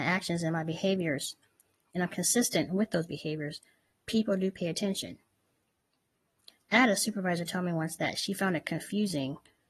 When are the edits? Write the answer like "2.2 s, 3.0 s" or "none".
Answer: none